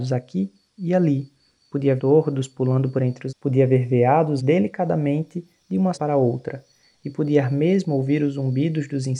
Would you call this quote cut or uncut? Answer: cut